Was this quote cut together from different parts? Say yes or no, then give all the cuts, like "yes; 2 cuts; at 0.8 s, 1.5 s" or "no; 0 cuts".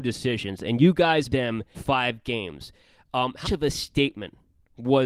yes; 3 cuts; at 1.3 s, 1.7 s, 3.4 s